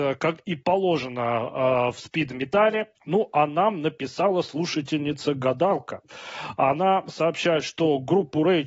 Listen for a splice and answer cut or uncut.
cut